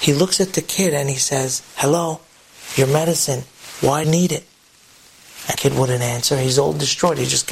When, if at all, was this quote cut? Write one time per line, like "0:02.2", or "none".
0:04.0
0:05.5